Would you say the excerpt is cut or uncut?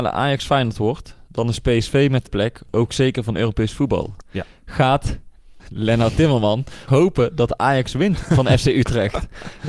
cut